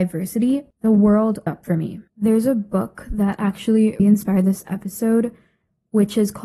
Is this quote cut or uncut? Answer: cut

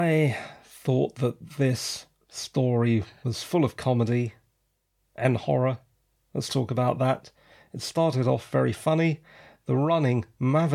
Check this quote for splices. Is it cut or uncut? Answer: uncut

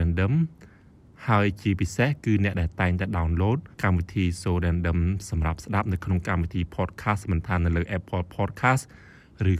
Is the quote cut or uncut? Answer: cut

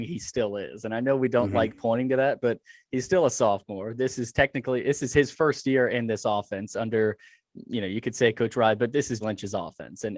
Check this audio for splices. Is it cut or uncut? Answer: cut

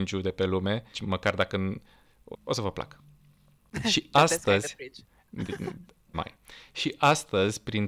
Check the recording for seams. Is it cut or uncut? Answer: cut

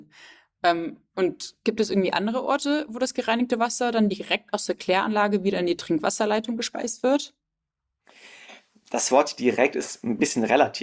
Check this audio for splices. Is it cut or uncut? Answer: uncut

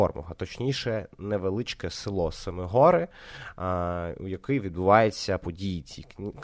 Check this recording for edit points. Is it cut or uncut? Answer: uncut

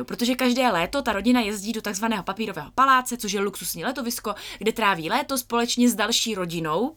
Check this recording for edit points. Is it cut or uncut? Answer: uncut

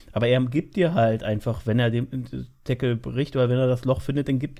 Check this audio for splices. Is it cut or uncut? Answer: uncut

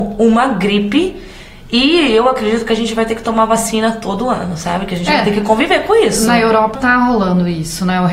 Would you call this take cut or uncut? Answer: cut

